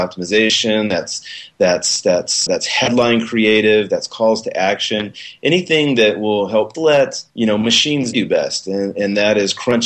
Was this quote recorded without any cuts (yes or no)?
no